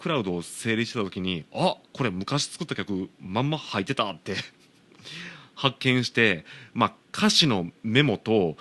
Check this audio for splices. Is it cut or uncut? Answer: uncut